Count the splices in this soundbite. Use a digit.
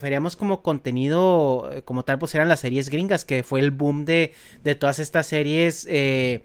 0